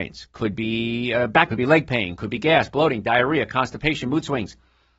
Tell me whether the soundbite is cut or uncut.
cut